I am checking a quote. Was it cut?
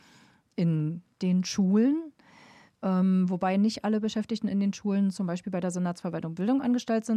no; 0 cuts

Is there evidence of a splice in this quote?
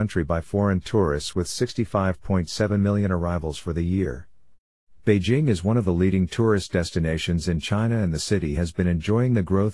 no; 0 cuts

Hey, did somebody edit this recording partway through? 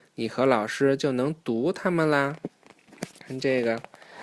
yes; 1 cut; at 3.1 s

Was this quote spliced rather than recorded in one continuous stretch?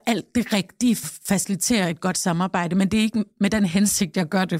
yes; 1 cut; at 1.0 s

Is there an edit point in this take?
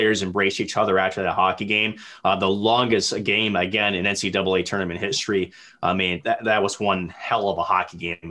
no; 0 cuts

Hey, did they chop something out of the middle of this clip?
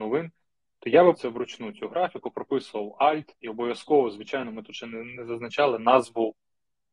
yes; 1 cut; at 1.1 s

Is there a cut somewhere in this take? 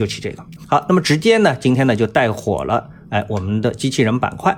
no; 0 cuts

